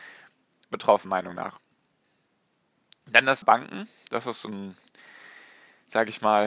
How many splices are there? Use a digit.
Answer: 2